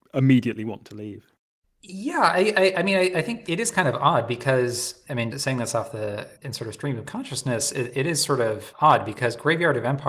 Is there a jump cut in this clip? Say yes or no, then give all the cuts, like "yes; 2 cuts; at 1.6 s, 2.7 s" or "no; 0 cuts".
yes; 1 cut; at 5.3 s